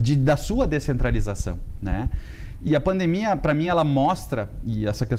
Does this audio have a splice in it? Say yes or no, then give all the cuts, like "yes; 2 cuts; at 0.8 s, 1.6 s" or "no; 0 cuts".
no; 0 cuts